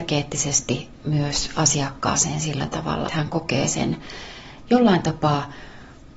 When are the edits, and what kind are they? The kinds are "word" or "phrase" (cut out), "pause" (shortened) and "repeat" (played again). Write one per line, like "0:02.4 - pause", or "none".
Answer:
0:03.1 - word